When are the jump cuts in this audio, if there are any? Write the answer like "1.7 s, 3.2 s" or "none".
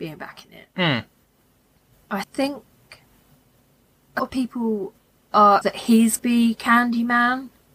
2.2 s, 4.2 s, 5.6 s, 6.2 s